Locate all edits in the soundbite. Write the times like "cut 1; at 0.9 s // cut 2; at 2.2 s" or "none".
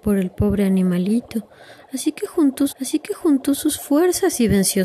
cut 1; at 2.7 s